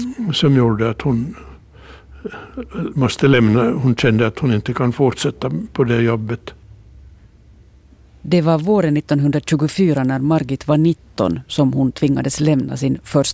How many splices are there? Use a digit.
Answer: 0